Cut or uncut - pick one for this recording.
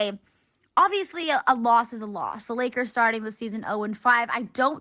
uncut